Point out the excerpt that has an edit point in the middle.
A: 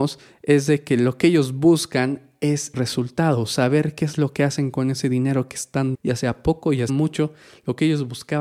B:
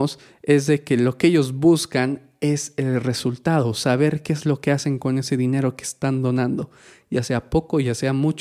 A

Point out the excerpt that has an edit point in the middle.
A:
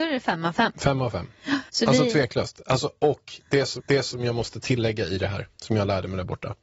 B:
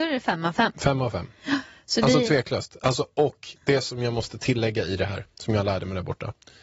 A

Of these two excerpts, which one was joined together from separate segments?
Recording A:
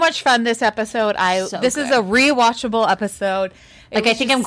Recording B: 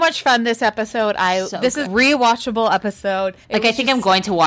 B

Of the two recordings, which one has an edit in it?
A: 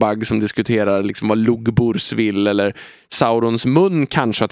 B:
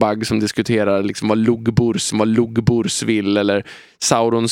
B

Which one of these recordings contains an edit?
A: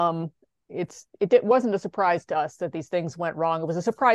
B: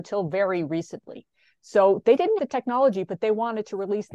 B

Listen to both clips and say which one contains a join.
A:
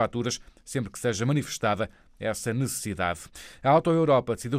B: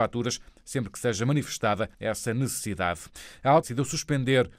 B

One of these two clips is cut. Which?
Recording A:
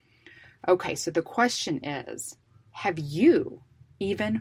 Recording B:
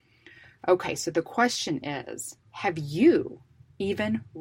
B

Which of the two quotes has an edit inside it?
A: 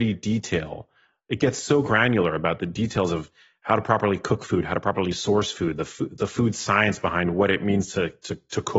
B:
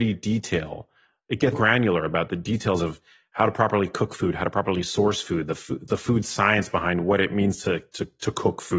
B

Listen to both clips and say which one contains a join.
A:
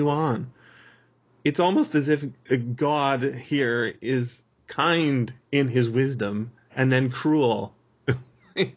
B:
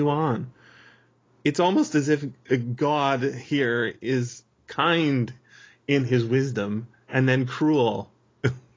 A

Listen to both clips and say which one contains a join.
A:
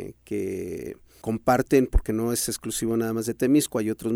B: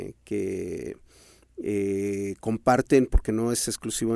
A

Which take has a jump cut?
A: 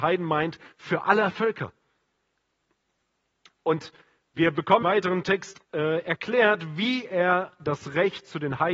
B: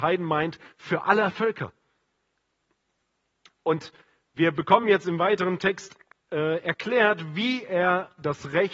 A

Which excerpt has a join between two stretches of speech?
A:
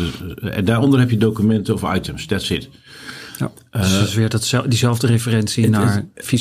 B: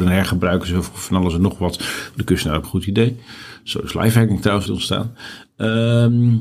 B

